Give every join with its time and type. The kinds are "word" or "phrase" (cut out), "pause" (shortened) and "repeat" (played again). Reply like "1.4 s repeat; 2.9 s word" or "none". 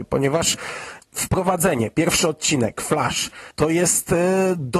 1.0 s pause; 3.5 s pause